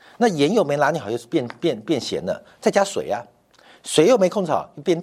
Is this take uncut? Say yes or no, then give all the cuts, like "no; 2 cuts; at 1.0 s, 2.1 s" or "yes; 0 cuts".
yes; 0 cuts